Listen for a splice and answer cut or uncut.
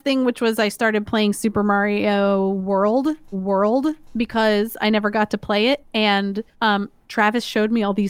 cut